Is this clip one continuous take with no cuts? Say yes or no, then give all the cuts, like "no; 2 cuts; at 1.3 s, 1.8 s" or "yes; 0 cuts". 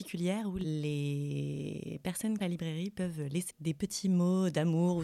no; 2 cuts; at 2.4 s, 3.5 s